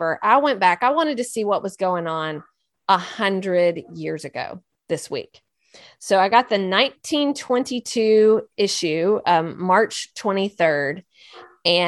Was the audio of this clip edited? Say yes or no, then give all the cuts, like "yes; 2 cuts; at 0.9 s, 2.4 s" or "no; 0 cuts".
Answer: no; 0 cuts